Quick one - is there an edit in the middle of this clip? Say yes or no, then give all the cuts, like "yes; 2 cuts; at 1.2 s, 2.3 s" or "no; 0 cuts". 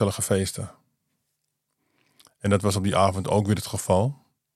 no; 0 cuts